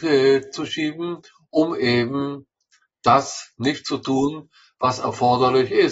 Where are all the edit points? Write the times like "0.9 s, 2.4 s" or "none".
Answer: none